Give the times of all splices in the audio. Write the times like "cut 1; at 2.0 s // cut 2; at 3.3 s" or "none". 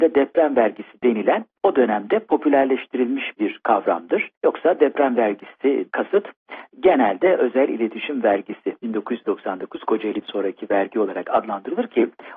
cut 1; at 4.3 s // cut 2; at 5.9 s // cut 3; at 10.2 s